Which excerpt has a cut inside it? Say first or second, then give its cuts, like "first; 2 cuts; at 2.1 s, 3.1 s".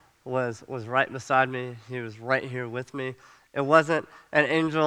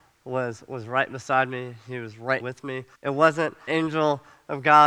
second; 3 cuts; at 2.4 s, 2.9 s, 3.7 s